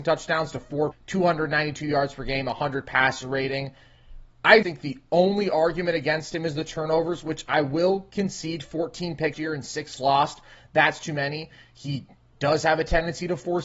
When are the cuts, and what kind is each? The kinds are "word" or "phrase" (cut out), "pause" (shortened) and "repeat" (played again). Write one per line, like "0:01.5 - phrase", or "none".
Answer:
0:00.9 - word
0:04.6 - word
0:09.3 - word
0:10.0 - word